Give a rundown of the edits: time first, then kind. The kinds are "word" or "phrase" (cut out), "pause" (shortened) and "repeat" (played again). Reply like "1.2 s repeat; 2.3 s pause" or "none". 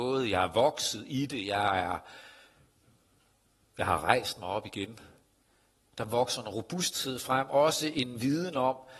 none